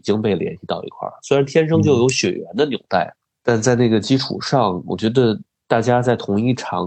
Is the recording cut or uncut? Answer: uncut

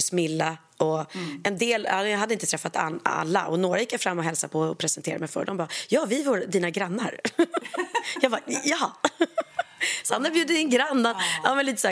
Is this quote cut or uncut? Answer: uncut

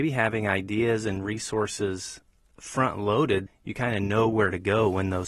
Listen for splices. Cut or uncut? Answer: cut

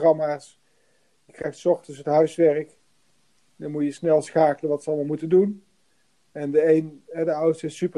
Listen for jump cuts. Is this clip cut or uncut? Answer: uncut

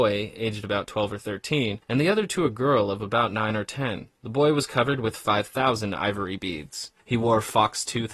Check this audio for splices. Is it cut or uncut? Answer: cut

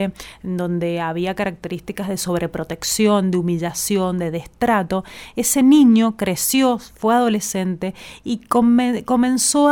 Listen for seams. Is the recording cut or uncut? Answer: uncut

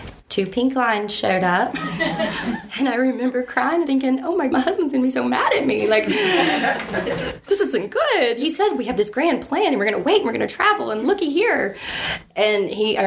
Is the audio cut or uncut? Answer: cut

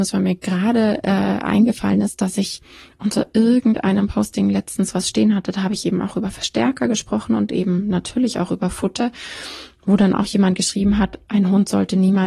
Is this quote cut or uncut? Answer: uncut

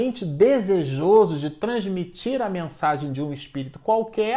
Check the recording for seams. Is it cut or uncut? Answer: uncut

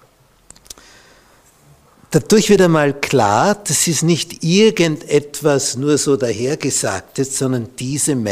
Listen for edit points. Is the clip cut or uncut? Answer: uncut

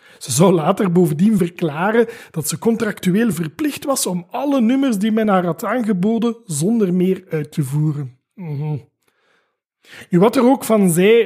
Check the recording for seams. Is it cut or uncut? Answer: uncut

